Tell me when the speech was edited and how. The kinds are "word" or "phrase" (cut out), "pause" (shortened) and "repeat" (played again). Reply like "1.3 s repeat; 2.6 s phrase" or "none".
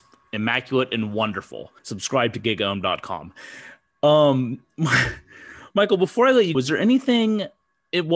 1.8 s pause; 6.5 s word